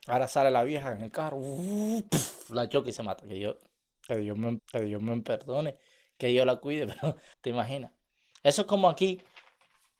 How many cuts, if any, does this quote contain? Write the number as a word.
two